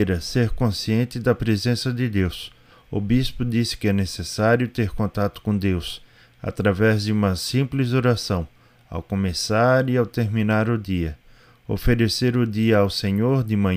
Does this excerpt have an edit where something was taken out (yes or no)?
no